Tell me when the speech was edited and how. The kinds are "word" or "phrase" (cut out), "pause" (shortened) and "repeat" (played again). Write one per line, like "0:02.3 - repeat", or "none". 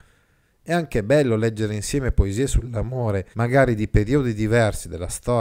0:03.3 - pause